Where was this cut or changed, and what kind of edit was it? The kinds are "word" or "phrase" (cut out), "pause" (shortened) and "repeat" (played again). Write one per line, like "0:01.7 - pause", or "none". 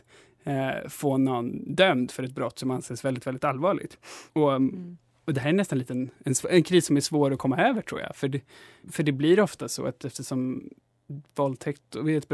0:04.3 - pause
0:06.1 - pause
0:08.8 - word